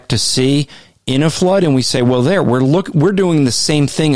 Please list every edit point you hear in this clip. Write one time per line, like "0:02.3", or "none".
none